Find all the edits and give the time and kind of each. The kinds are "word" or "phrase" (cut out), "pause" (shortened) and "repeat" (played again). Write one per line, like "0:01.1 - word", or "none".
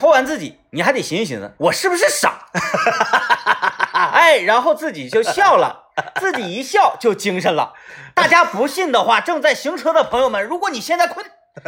0:01.6 - pause